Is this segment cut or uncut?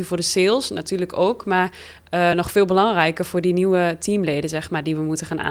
uncut